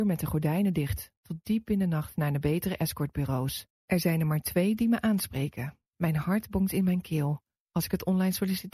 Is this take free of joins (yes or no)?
no